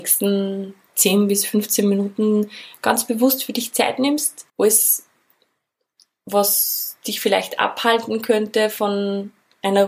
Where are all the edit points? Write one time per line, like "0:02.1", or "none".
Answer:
0:04.5